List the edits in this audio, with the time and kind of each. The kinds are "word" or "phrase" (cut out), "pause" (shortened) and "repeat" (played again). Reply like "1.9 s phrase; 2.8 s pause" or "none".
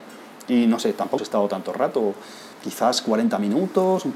1.2 s word; 2.5 s pause